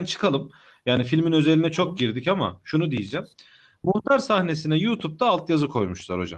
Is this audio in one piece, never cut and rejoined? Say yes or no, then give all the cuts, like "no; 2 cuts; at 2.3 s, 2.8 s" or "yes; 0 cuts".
yes; 0 cuts